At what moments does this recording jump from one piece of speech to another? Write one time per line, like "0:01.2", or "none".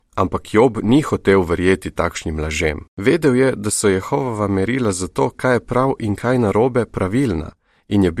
0:02.9